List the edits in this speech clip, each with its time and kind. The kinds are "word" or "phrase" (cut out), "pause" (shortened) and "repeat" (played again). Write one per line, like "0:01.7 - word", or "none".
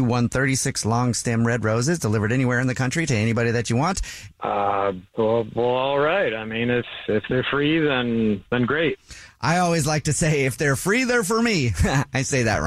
0:04.3 - pause

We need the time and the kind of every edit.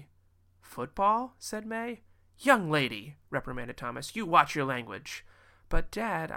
none

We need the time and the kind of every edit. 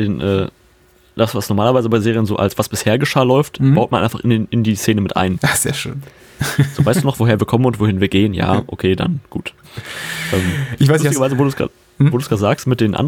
none

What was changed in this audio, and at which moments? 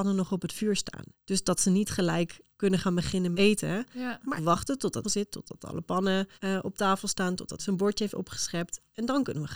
0:01.1 - pause
0:02.5 - word
0:03.3 - word
0:04.4 - word
0:05.0 - phrase
0:06.4 - pause
0:07.6 - word

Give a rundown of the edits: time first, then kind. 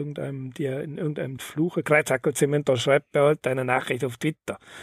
0:01.4 - word

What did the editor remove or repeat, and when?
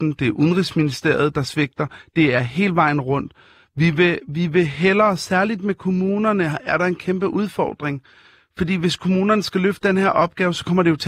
none

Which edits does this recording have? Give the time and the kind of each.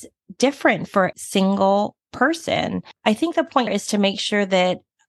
0:01.1 - word
0:03.0 - pause
0:03.7 - word

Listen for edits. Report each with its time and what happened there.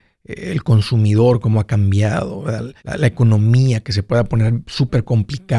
0:02.8 - pause

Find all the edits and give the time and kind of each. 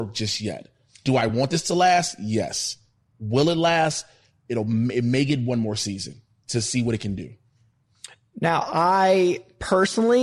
none

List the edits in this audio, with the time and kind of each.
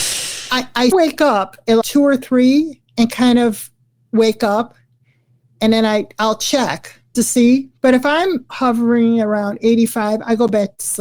0:00.9 - word
0:01.8 - word
0:07.1 - word
0:07.8 - pause
0:08.5 - phrase

